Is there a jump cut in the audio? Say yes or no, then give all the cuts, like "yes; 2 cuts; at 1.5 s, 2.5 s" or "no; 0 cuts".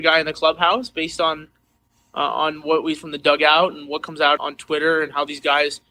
yes; 2 cuts; at 2.9 s, 4.4 s